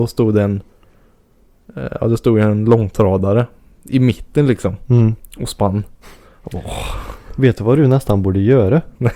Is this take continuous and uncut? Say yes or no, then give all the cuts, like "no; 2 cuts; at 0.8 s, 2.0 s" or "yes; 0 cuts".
yes; 0 cuts